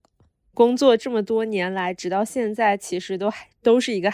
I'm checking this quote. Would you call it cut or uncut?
uncut